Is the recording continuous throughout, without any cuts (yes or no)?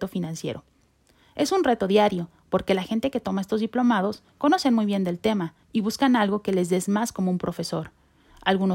no